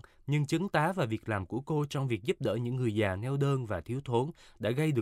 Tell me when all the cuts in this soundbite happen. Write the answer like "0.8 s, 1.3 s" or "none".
none